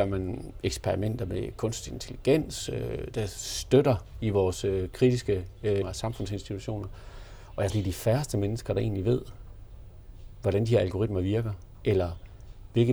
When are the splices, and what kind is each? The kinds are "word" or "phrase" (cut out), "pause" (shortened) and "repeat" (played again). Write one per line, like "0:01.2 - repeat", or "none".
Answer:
0:05.8 - word
0:07.7 - word